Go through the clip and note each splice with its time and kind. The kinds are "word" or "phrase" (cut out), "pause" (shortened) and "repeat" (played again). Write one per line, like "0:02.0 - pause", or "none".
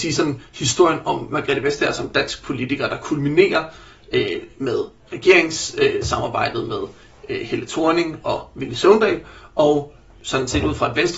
none